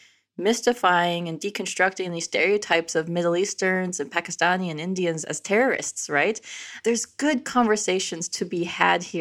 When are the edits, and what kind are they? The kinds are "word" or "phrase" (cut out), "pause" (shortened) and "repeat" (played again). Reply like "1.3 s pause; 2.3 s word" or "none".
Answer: none